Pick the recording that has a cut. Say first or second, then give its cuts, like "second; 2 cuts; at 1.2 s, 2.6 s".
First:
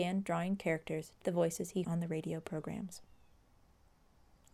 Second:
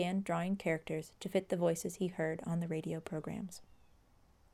first; 2 cuts; at 1.2 s, 1.8 s